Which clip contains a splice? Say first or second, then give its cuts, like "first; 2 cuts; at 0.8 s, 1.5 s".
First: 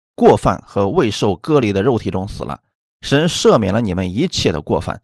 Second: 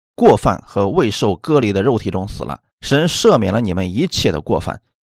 second; 1 cut; at 2.7 s